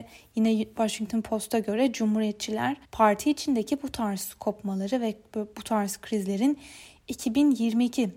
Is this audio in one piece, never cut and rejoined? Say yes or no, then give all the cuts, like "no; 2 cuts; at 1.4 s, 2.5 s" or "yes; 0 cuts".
no; 1 cut; at 2.8 s